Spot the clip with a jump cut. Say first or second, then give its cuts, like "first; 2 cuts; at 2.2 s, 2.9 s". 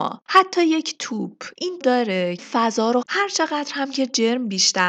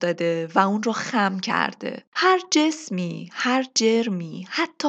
first; 3 cuts; at 1.8 s, 2.4 s, 3.0 s